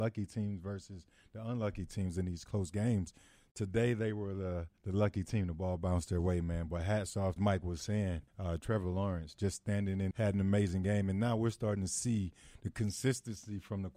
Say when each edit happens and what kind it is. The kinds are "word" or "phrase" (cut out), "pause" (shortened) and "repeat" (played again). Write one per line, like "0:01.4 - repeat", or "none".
0:04.8 - pause
0:07.4 - phrase
0:08.3 - pause
0:10.1 - word